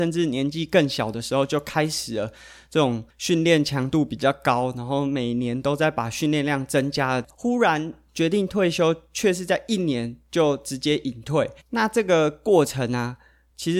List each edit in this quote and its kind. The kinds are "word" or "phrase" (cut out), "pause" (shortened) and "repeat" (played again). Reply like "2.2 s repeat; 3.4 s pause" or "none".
11.6 s pause